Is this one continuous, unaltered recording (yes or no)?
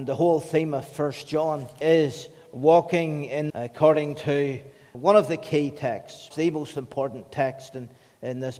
no